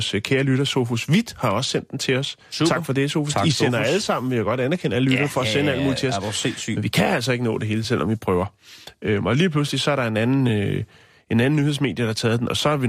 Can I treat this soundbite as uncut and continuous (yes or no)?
yes